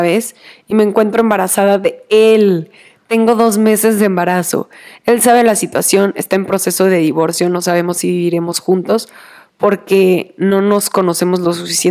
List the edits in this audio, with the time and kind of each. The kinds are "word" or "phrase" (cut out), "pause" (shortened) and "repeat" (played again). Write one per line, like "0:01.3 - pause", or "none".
none